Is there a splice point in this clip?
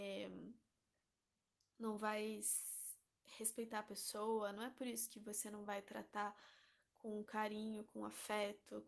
no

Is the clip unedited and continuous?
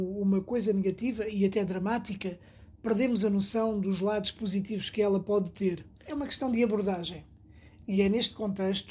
no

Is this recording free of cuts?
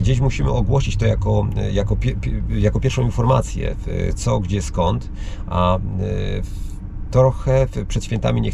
yes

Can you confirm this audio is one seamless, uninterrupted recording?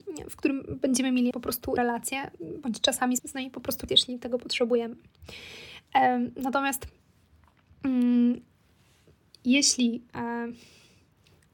no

